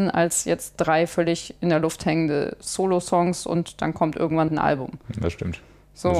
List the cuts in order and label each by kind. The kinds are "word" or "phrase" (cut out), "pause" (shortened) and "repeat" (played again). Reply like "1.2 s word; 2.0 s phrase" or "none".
4.5 s word